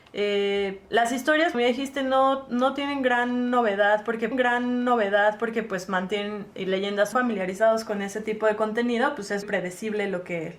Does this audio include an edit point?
yes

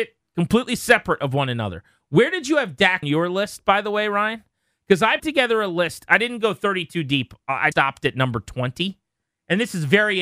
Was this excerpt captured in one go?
no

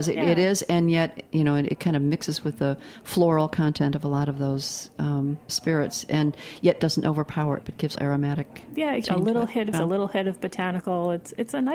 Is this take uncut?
no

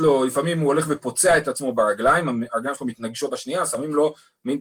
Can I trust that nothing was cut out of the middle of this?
no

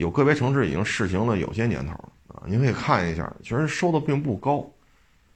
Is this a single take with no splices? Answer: no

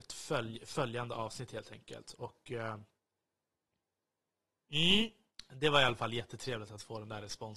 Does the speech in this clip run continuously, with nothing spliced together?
yes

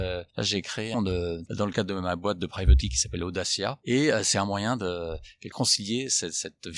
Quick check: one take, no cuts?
no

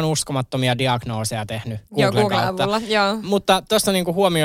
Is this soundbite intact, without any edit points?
no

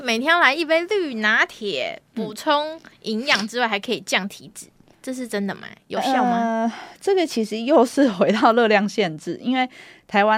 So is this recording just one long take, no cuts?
yes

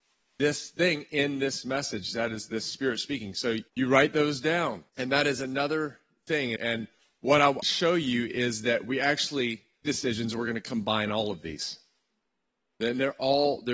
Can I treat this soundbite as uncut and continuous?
no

